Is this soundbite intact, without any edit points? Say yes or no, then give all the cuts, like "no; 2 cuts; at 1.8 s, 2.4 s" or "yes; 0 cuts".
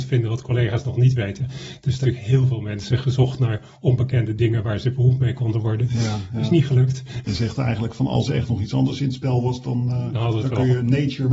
no; 1 cut; at 2.0 s